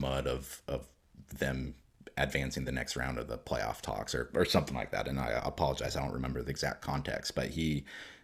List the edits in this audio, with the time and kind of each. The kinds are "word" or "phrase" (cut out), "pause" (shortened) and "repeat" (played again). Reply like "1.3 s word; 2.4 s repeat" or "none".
none